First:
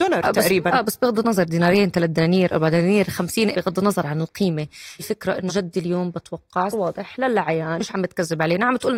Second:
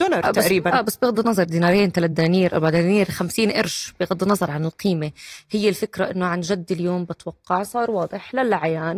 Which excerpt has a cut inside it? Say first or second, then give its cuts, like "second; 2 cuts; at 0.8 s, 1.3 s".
first; 5 cuts; at 3.5 s, 5.0 s, 5.5 s, 6.7 s, 7.8 s